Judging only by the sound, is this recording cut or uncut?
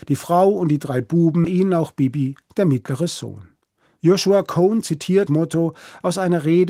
cut